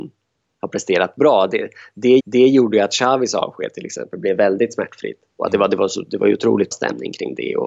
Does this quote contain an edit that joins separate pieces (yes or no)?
yes